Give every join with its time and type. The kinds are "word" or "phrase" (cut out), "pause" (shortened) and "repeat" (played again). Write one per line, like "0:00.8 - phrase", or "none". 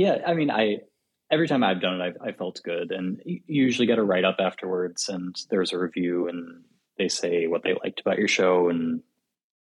none